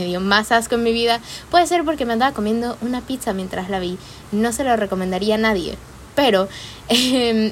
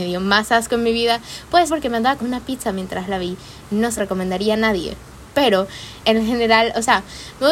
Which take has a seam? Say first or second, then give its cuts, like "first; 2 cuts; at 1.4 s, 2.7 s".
second; 4 cuts; at 1.7 s, 2.2 s, 4.0 s, 6.0 s